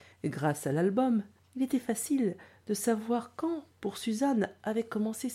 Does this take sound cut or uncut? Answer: uncut